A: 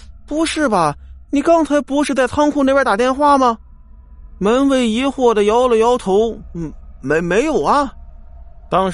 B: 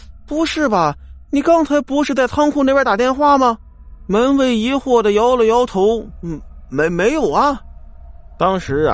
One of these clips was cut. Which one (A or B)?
B